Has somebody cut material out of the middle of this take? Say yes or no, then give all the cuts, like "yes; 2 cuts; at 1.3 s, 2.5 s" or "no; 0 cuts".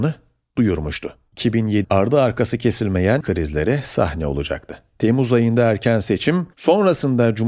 yes; 3 cuts; at 1.8 s, 3.2 s, 6.5 s